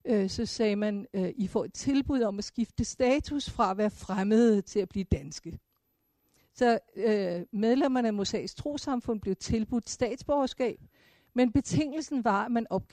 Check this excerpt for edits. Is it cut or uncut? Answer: uncut